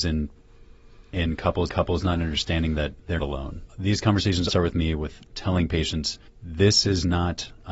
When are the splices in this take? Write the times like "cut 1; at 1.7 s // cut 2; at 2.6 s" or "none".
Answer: cut 1; at 1.7 s // cut 2; at 3.2 s // cut 3; at 4.5 s // cut 4; at 6.3 s